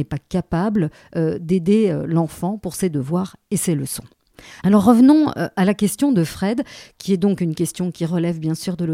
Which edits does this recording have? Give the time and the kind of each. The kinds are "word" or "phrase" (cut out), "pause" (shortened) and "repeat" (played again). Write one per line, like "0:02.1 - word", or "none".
none